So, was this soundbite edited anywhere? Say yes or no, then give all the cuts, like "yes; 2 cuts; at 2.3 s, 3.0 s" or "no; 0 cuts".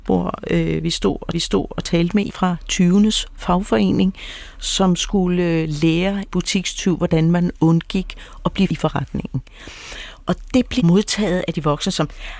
yes; 5 cuts; at 1.3 s, 2.3 s, 6.3 s, 8.7 s, 10.8 s